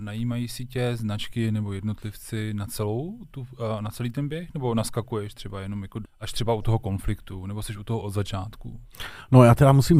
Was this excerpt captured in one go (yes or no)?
no